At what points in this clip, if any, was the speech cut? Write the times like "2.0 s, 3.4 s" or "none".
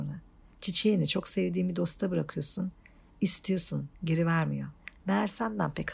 none